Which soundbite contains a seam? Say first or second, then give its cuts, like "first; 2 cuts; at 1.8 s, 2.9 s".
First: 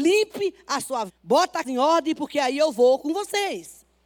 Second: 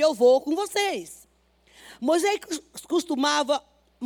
first; 2 cuts; at 1.1 s, 1.6 s